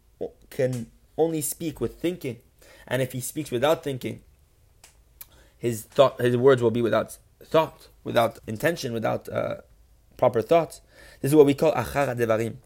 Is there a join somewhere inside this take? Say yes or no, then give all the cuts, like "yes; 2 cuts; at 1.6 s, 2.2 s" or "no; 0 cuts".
yes; 1 cut; at 8.4 s